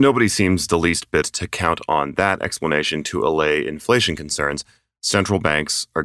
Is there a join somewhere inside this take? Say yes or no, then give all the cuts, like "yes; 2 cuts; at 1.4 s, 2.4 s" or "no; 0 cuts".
yes; 1 cut; at 1.2 s